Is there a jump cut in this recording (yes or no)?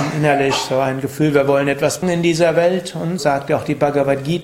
yes